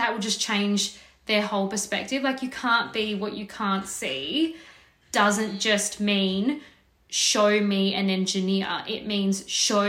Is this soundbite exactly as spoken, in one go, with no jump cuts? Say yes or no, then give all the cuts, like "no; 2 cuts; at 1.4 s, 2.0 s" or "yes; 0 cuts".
yes; 0 cuts